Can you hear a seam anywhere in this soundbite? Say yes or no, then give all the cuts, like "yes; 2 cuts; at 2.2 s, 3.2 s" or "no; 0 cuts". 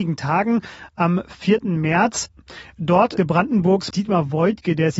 yes; 2 cuts; at 3.2 s, 3.9 s